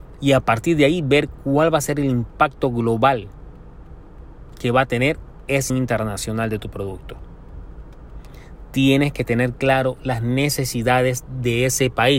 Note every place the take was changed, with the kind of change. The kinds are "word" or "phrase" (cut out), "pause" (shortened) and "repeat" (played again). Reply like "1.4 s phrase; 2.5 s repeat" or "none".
5.7 s word

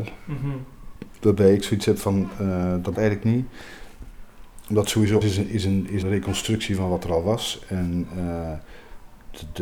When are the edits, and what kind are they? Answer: 3.0 s word; 5.2 s word; 6.0 s word

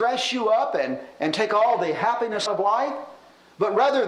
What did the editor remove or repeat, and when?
2.5 s word

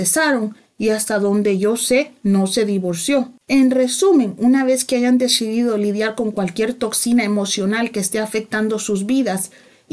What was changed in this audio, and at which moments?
3.4 s pause

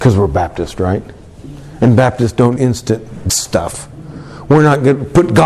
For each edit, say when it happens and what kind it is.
2.6 s word; 3.3 s word

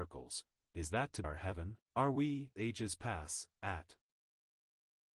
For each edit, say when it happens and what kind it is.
1.2 s word; 1.8 s pause; 2.6 s word

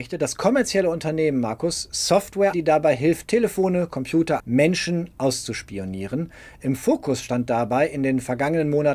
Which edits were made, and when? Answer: 2.5 s word; 4.4 s word

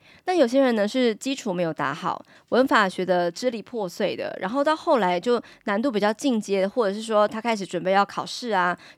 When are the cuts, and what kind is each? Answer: none

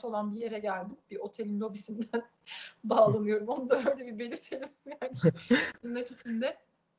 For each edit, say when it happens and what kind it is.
none

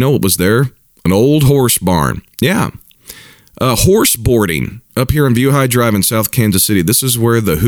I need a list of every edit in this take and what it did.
2.3 s pause; 4.9 s pause

